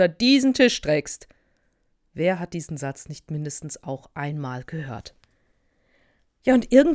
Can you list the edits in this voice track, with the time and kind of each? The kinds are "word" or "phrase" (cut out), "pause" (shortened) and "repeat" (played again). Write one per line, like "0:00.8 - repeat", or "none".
none

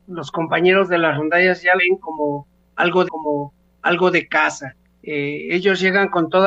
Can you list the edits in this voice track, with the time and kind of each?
0:01.8 - word
0:03.0 - repeat
0:04.8 - pause

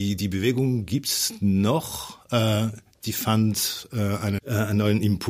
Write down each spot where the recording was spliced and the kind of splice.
0:04.4 - word

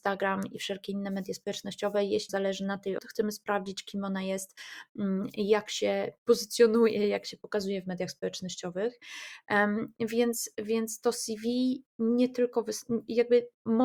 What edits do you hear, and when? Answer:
0:02.3 - word
0:03.0 - word

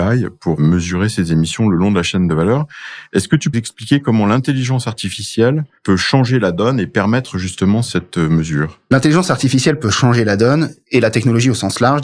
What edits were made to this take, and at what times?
0:03.5 - word

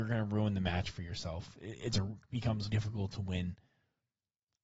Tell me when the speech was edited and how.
0:02.7 - word

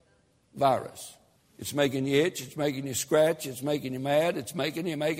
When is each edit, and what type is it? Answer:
0:01.4 - pause

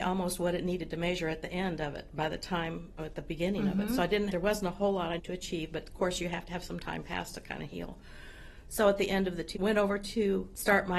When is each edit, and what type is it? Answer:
0:03.0 - word
0:04.3 - word
0:05.2 - word
0:09.5 - word

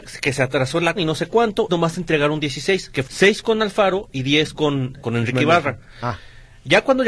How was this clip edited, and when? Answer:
0:01.0 - word
0:01.7 - word
0:03.0 - word
0:05.0 - word

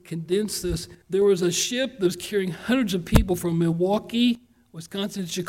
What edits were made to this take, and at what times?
0:01.0 - pause

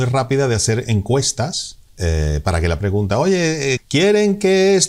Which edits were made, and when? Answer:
0:01.9 - pause
0:02.8 - phrase
0:03.8 - word

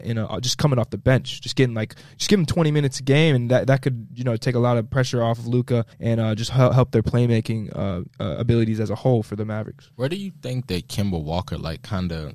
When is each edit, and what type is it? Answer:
0:05.9 - pause
0:08.1 - pause
0:09.9 - pause

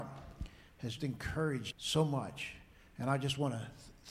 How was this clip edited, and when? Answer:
0:01.0 - word
0:01.7 - word

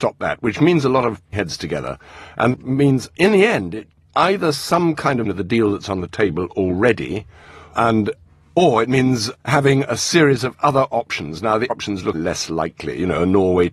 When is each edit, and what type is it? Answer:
0:01.3 - word
0:02.5 - word
0:04.1 - word
0:05.2 - word
0:07.7 - word
0:09.3 - word
0:11.7 - word
0:12.1 - word

